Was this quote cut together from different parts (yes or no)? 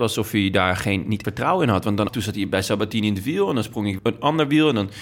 yes